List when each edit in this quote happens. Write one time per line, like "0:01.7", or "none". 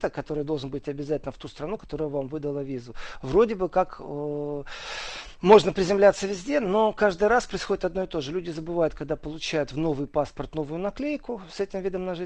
none